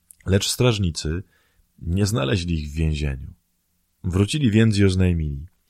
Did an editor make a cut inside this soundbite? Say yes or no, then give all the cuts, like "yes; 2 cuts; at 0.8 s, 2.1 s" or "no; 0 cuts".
no; 0 cuts